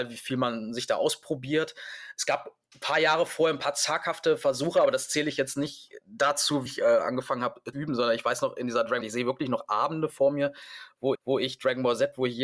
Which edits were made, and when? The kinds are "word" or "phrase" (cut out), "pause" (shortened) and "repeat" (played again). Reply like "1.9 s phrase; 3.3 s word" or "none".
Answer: 6.7 s word; 7.7 s word; 9.0 s phrase; 11.1 s repeat